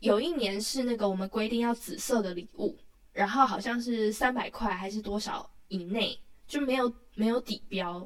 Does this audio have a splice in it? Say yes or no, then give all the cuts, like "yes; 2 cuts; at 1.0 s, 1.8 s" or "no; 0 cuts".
no; 0 cuts